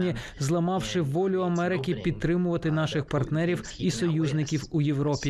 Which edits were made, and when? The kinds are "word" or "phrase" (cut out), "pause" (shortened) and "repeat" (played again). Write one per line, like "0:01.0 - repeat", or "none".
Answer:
none